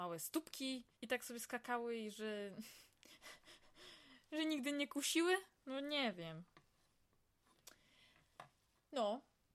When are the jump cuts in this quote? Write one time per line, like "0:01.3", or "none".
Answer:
0:00.9

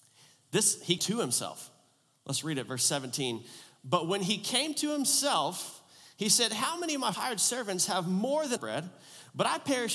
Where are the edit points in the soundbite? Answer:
0:01.0
0:07.1
0:08.6

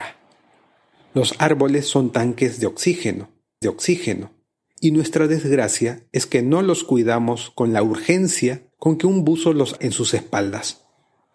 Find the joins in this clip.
0:03.6
0:08.7
0:09.8

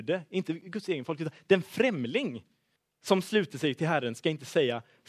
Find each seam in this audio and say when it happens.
0:02.8

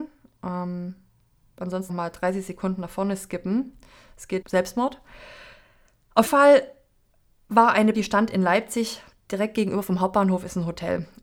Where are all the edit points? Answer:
0:01.9
0:04.4
0:06.3
0:07.9

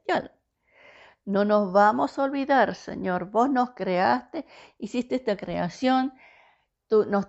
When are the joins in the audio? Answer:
none

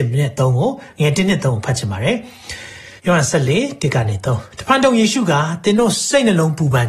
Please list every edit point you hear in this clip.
0:03.0

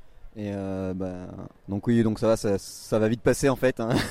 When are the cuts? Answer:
0:01.6

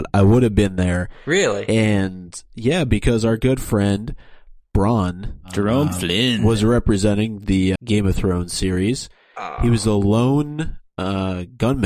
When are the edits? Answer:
0:07.8

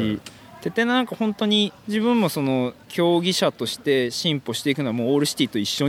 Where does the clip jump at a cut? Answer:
0:01.8
0:02.8

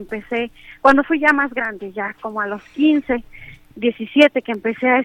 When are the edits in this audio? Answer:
none

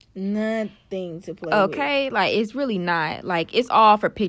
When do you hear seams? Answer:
none

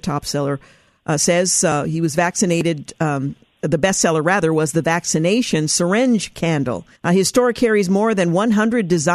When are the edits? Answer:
0:07.0

